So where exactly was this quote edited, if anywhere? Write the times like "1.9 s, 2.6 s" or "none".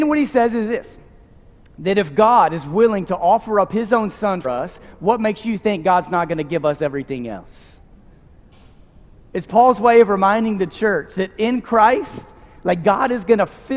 4.4 s